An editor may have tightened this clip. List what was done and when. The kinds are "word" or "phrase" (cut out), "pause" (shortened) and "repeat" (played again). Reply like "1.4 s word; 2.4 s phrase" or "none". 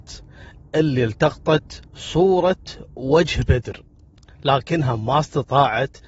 1.9 s pause